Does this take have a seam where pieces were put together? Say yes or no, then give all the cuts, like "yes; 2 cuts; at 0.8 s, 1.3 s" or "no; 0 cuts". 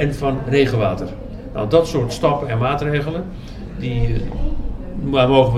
no; 0 cuts